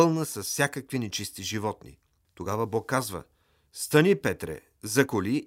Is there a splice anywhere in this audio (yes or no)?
no